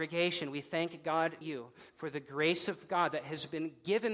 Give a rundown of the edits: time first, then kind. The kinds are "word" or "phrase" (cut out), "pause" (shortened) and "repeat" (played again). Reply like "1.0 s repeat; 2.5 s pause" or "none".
1.4 s word